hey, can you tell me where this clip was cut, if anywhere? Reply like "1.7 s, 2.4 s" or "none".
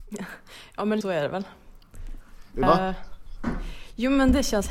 1.0 s, 2.6 s